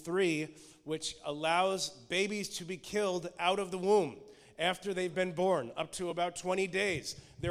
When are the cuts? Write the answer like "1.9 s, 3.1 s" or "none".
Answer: none